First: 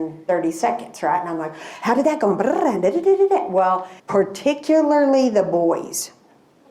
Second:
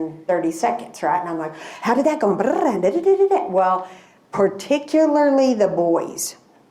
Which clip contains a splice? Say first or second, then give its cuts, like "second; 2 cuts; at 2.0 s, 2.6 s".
first; 1 cut; at 4.0 s